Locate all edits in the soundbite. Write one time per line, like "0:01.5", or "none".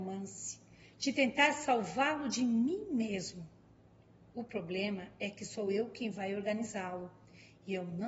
none